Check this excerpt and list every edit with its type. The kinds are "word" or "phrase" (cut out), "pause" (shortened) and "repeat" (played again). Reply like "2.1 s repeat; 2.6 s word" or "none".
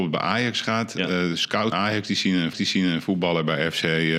1.7 s word; 2.5 s repeat

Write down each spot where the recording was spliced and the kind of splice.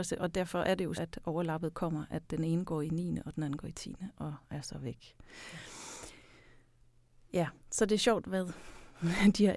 0.9 s word; 4.4 s pause; 7.6 s pause

